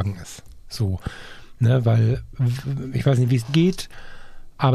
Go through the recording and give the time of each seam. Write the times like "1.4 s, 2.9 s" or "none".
3.5 s